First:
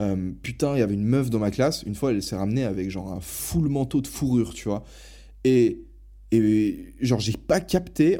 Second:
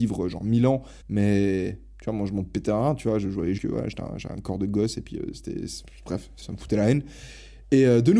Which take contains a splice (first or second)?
second